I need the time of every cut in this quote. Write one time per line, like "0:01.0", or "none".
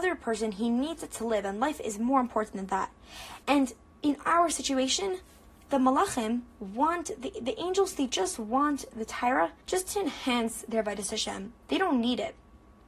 0:03.4
0:09.6
0:11.6